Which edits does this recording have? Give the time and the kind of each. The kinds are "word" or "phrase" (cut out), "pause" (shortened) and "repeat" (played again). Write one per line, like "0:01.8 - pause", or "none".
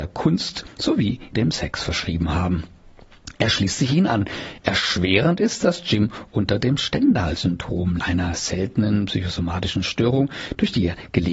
0:01.3 - word
0:08.0 - word